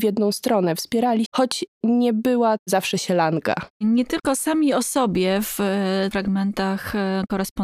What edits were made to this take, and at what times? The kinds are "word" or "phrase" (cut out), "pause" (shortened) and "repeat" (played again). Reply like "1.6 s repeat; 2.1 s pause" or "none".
1.3 s word; 2.6 s word; 3.7 s pause; 6.1 s word